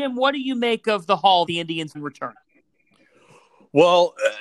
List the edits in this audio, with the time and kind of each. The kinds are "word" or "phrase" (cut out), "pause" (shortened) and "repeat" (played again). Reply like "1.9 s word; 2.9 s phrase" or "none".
1.5 s word; 1.9 s word